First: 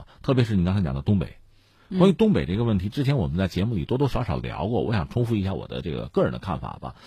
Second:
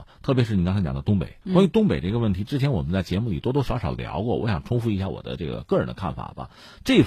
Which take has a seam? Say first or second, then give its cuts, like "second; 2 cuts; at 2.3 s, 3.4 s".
second; 1 cut; at 1.4 s